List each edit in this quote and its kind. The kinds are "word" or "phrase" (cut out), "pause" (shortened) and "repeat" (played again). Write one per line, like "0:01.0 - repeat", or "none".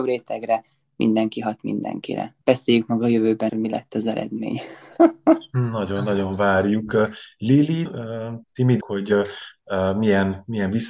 0:02.4 - pause
0:03.5 - word
0:07.9 - word
0:08.4 - pause
0:08.8 - word